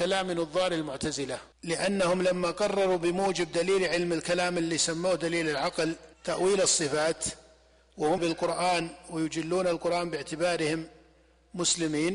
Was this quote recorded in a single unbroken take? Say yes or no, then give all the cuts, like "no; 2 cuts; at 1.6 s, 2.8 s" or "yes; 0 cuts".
no; 3 cuts; at 1.5 s, 6.1 s, 8.2 s